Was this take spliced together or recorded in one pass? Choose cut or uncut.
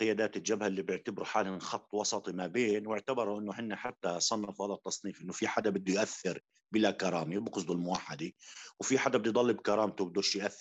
uncut